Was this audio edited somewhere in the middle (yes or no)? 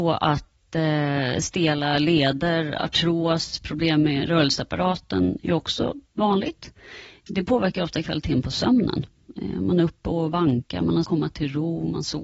yes